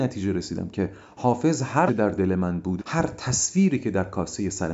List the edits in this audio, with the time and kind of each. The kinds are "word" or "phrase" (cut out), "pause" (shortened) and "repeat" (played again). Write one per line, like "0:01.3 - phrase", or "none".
0:01.9 - word
0:02.8 - word